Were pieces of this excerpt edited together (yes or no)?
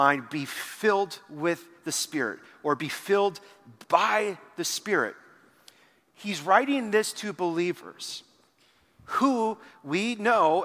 no